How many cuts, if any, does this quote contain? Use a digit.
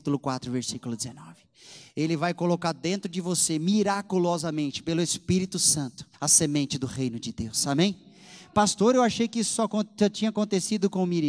1